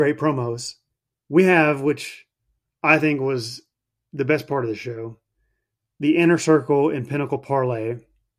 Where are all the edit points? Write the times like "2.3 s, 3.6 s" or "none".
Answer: none